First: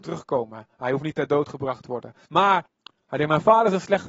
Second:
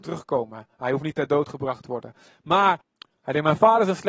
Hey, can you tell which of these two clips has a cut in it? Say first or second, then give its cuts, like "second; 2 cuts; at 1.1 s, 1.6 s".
first; 1 cut; at 2.2 s